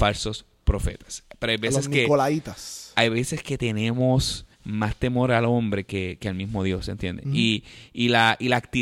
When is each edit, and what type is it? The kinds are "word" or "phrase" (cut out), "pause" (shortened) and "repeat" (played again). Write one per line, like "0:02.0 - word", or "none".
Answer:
0:04.5 - pause